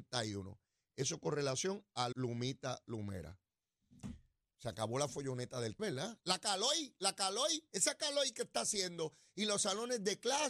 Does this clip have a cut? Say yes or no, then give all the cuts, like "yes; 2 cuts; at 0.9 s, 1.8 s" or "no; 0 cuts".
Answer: yes; 2 cuts; at 2.1 s, 5.8 s